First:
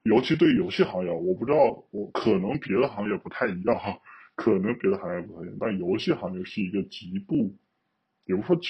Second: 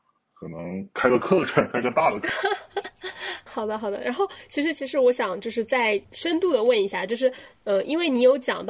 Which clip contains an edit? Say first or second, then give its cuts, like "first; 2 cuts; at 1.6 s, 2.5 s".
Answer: second; 2 cuts; at 3.5 s, 6.0 s